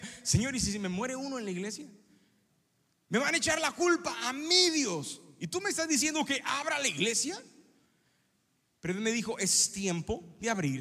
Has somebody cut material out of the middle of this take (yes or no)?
no